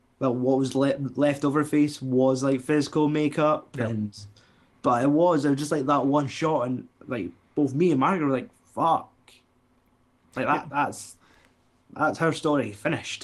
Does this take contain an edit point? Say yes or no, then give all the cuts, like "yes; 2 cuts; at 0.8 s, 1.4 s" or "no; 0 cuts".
no; 0 cuts